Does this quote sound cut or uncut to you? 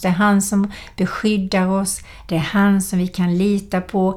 uncut